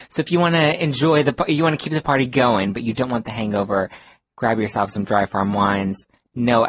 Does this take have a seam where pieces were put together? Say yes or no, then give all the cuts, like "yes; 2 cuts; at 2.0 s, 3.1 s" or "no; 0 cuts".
no; 0 cuts